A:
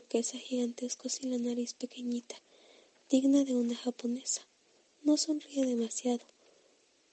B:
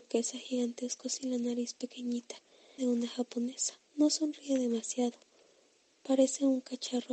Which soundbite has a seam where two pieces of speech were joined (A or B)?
B